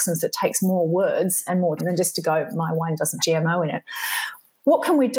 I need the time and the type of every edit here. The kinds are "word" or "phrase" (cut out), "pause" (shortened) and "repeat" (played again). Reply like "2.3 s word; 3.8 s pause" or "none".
1.5 s word; 1.8 s word; 3.2 s word